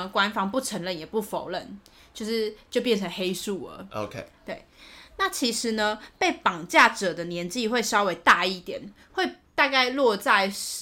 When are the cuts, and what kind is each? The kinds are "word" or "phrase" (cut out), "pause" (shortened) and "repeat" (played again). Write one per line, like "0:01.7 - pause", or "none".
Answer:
none